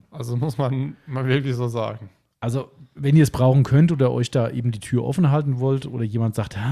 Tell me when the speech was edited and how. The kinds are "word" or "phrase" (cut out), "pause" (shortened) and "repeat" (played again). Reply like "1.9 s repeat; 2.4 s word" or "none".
none